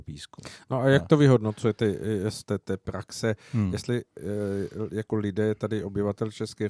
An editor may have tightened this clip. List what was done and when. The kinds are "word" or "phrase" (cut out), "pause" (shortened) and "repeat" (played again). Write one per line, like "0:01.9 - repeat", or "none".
0:02.4 - phrase